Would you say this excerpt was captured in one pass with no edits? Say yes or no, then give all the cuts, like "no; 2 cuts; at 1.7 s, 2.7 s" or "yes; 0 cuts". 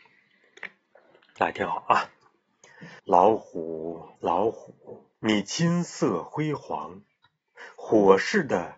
no; 3 cuts; at 3.0 s, 4.1 s, 5.1 s